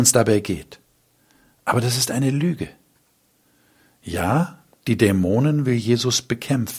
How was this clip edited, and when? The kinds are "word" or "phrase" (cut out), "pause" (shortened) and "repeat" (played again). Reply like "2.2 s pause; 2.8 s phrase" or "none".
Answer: none